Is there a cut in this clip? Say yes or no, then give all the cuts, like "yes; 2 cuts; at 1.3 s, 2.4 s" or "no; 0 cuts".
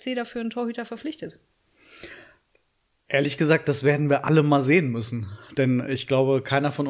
no; 0 cuts